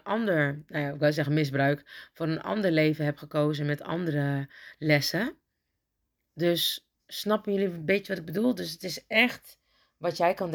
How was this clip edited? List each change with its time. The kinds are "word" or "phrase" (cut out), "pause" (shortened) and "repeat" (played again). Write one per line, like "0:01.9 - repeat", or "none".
0:07.0 - pause